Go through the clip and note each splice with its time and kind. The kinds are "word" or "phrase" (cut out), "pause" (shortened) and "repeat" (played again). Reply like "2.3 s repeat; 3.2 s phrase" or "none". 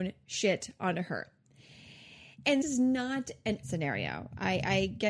2.6 s word; 3.6 s word